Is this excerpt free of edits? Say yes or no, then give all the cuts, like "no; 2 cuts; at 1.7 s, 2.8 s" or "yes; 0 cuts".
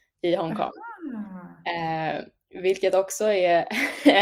yes; 0 cuts